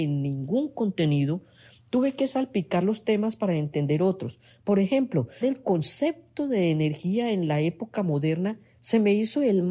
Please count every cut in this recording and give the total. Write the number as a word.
one